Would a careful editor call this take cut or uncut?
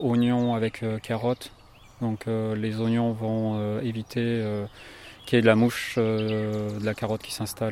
uncut